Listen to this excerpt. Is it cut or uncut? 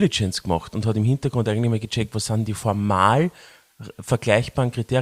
uncut